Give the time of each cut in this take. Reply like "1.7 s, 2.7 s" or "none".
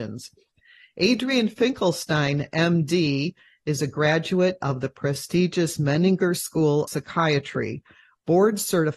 6.9 s